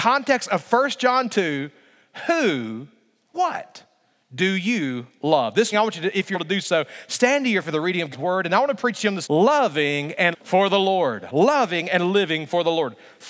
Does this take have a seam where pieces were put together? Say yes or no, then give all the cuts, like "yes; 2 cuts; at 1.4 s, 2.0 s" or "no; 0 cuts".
yes; 7 cuts; at 3.3 s, 5.7 s, 6.3 s, 7.6 s, 8.1 s, 9.2 s, 10.3 s